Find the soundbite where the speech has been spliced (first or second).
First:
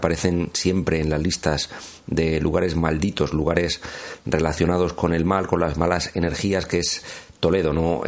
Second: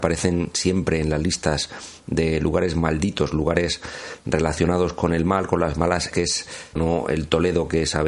second